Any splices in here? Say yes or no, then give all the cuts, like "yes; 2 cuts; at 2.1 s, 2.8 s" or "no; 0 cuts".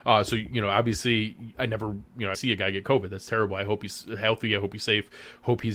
yes; 2 cuts; at 1.5 s, 2.3 s